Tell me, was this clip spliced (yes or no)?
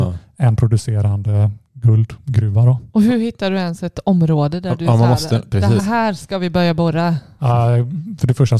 yes